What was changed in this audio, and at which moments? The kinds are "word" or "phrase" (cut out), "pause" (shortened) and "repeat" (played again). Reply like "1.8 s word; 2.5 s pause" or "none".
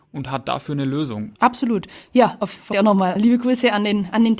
1.4 s pause; 2.7 s phrase; 3.2 s word